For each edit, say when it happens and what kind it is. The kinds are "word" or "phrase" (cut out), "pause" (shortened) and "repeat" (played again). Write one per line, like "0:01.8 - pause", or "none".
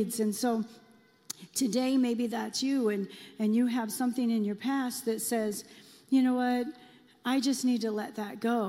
none